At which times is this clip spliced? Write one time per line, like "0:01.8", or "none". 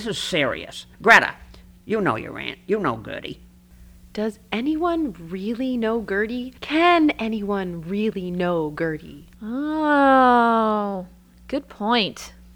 0:00.9
0:06.6
0:09.3